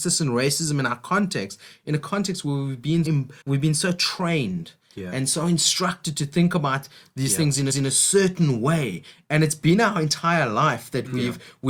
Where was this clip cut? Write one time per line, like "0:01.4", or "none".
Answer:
0:03.0
0:03.4
0:07.7